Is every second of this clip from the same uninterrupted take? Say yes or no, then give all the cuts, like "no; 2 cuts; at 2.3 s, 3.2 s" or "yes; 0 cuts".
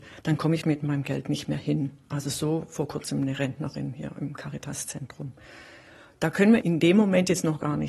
yes; 0 cuts